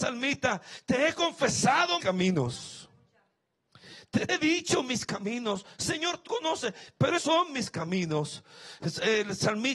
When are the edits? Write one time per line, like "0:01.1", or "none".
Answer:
0:02.0
0:04.3
0:06.3
0:07.2